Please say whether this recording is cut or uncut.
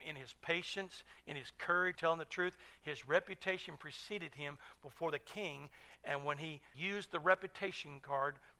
cut